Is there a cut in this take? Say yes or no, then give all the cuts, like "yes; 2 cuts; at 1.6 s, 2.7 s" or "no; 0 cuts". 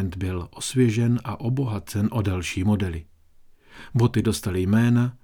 no; 0 cuts